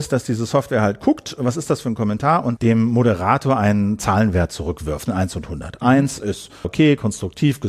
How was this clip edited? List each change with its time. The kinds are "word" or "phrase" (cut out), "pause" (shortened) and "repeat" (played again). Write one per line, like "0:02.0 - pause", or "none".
0:02.6 - word
0:05.1 - word
0:06.6 - word